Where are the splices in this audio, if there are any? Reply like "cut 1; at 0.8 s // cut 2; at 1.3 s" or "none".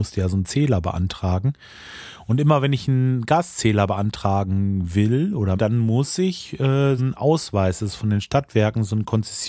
cut 1; at 5.6 s // cut 2; at 7.0 s